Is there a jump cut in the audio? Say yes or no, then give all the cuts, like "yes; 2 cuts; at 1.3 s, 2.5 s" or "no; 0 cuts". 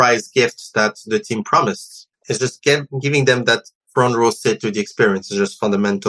yes; 2 cuts; at 2.1 s, 3.8 s